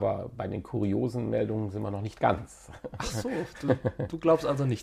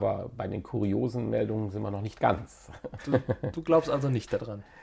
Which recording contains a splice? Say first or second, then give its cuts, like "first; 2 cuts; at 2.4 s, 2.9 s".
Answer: second; 1 cut; at 3.0 s